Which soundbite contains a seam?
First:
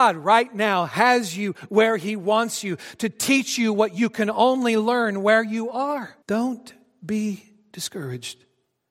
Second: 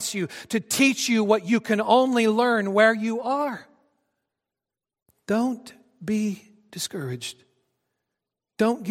first; 1 cut; at 6.2 s

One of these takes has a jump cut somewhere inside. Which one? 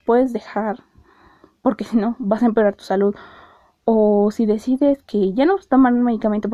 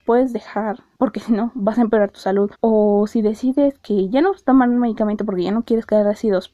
second; 2 cuts; at 0.9 s, 2.5 s

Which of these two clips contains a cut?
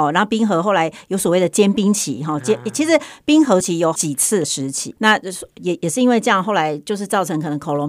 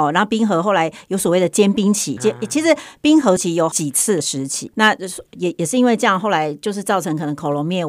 second; 1 cut; at 2.2 s

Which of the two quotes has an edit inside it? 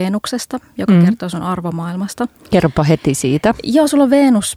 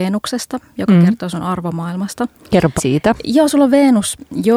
second; 1 cut; at 2.8 s

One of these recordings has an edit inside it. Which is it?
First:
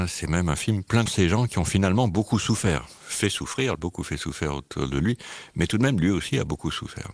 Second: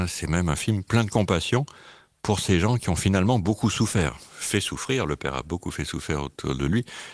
first; 2 cuts; at 1.1 s, 3.7 s

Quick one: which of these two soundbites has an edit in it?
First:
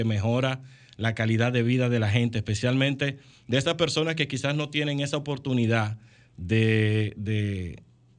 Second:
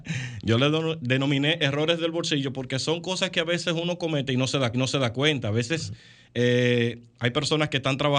second; 2 cuts; at 4.7 s, 7.1 s

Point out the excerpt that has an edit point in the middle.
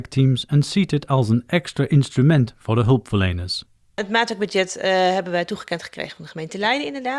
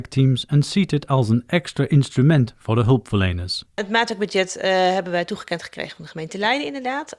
second; 1 cut; at 3.7 s

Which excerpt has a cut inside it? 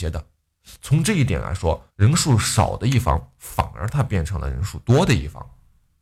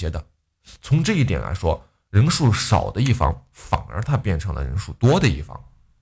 first; 1 cut; at 1.9 s

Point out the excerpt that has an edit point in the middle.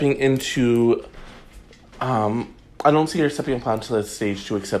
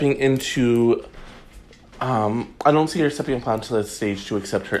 second; 1 cut; at 2.6 s

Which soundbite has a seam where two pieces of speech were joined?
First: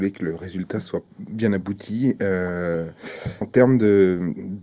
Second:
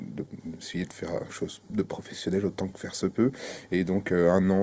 first; 2 cuts; at 1.1 s, 3.4 s

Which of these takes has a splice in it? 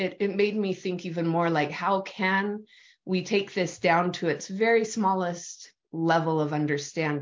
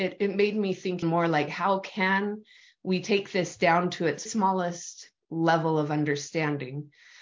second; 2 cuts; at 1.0 s, 4.3 s

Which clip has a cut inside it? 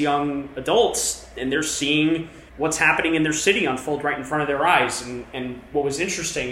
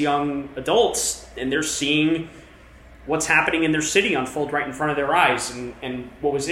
first; 1 cut; at 2.5 s

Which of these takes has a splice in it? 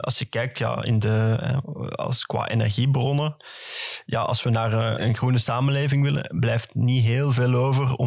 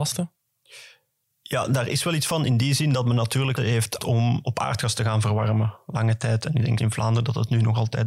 second; 3 cuts; at 3.6 s, 4.0 s, 6.8 s

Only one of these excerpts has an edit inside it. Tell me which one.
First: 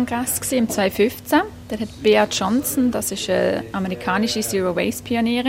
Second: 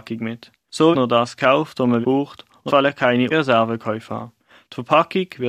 second; 4 cuts; at 0.9 s, 2.0 s, 2.7 s, 3.3 s

